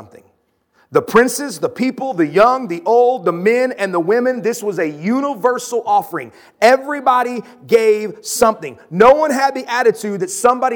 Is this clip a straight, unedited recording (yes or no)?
yes